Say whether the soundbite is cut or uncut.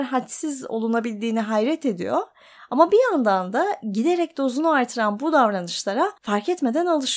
cut